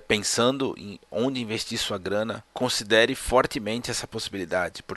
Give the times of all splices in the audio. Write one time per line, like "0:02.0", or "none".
none